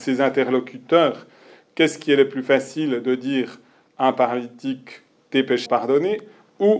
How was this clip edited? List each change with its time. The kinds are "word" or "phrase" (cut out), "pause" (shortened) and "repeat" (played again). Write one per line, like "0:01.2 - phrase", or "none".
0:05.7 - word